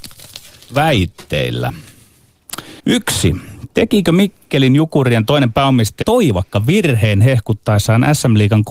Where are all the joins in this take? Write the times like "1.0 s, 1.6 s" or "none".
2.8 s, 6.0 s